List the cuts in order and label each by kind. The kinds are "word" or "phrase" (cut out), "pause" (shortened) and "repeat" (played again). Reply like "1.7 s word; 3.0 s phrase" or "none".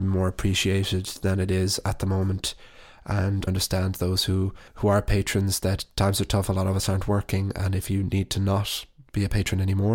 3.5 s phrase; 4.7 s pause